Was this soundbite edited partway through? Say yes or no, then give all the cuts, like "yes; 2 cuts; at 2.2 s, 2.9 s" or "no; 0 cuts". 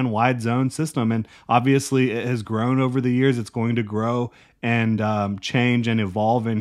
no; 0 cuts